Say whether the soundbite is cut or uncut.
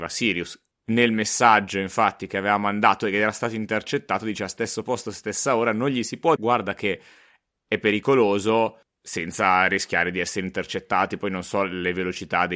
cut